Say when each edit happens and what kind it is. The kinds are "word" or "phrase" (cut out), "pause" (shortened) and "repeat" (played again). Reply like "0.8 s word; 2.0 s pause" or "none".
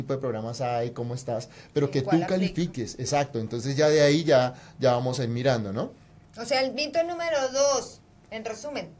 none